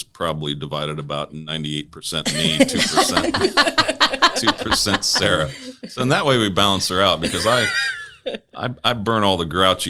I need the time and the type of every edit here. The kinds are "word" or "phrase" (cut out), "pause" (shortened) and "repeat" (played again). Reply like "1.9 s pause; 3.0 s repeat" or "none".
none